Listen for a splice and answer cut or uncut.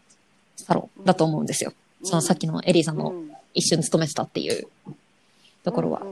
cut